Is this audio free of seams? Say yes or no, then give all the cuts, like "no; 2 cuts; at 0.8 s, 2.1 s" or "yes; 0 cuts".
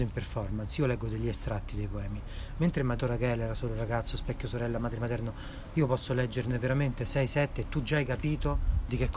no; 1 cut; at 3.0 s